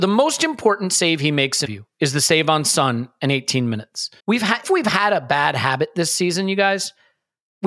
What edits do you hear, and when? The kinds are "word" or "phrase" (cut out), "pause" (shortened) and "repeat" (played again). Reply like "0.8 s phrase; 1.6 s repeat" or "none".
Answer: 1.7 s word; 4.2 s pause; 4.6 s word